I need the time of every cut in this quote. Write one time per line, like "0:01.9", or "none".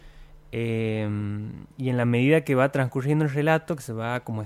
0:01.7